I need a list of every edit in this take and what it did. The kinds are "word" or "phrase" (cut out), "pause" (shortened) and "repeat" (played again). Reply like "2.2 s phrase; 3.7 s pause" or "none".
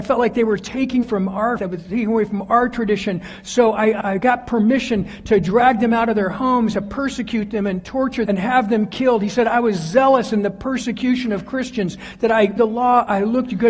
1.0 s word; 1.6 s word; 4.0 s word; 6.7 s word; 8.3 s word; 12.6 s word